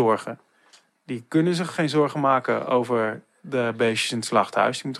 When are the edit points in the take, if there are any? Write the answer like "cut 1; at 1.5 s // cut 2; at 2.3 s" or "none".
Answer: none

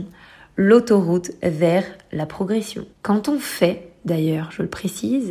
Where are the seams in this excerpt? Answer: cut 1; at 2.9 s

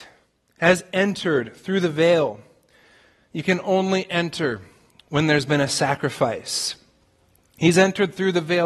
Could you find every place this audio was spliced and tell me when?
none

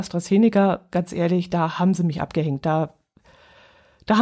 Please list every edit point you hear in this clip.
none

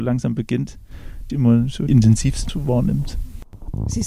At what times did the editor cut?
cut 1; at 1.3 s // cut 2; at 1.9 s // cut 3; at 2.5 s

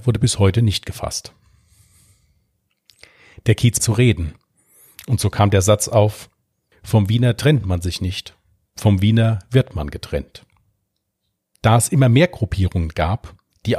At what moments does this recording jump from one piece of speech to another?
cut 1; at 3.8 s

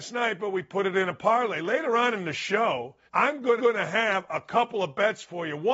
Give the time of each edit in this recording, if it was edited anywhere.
cut 1; at 3.1 s // cut 2; at 3.6 s

